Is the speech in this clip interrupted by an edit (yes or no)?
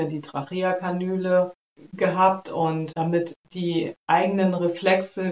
yes